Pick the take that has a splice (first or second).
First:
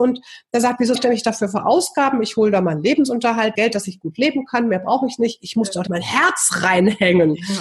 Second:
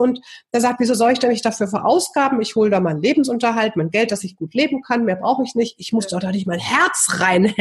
first